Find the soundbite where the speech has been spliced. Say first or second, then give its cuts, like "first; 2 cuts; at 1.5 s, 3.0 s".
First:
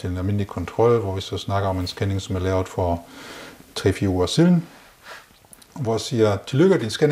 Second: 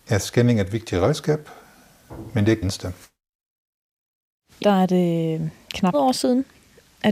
second; 3 cuts; at 2.6 s, 4.6 s, 5.9 s